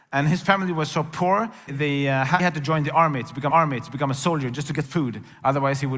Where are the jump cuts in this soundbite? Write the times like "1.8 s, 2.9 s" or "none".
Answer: 1.7 s, 2.4 s, 3.5 s, 4.8 s

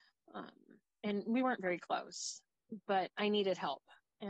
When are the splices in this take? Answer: none

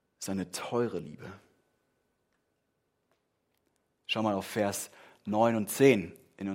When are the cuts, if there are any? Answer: none

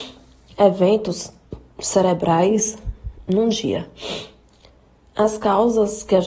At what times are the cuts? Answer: none

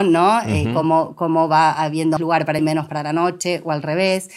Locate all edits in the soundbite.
2.2 s, 2.6 s

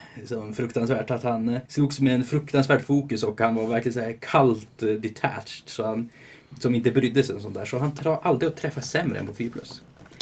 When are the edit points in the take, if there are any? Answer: 1.7 s

